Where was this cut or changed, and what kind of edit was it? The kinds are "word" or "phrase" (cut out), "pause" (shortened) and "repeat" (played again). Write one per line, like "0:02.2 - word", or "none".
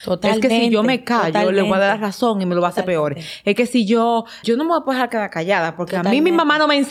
0:04.4 - word